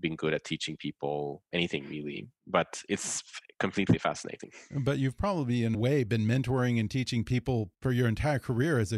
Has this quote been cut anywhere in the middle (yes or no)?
yes